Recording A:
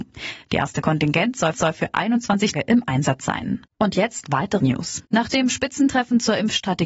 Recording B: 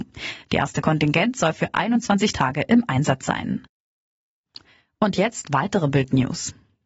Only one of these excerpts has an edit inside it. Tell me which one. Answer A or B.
A